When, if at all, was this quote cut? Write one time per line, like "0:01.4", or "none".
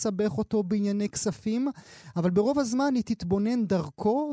none